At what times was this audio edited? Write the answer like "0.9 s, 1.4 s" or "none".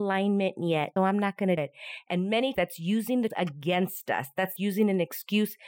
1.0 s, 1.6 s, 2.5 s, 3.3 s, 4.6 s